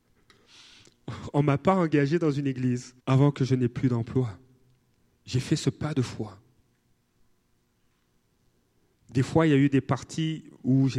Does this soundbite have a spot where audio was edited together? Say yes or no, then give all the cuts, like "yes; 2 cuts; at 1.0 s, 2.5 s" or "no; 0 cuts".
yes; 2 cuts; at 3.0 s, 4.9 s